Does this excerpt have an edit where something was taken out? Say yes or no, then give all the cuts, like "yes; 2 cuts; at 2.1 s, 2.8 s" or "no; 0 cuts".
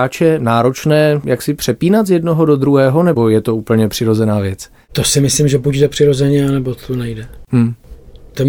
no; 0 cuts